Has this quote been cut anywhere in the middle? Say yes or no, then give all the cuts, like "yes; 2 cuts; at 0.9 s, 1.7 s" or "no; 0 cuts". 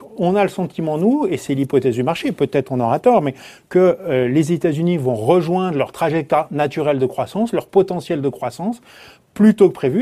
no; 0 cuts